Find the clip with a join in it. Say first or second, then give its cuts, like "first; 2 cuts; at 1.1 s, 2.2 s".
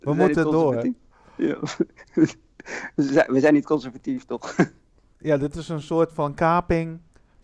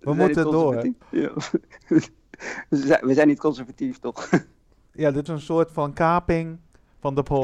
second; 2 cuts; at 1.0 s, 5.3 s